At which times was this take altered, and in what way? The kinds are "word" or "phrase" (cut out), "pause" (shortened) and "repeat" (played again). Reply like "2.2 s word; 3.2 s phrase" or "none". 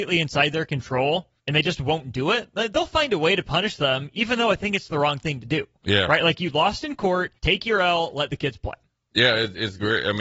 1.4 s pause; 7.4 s pause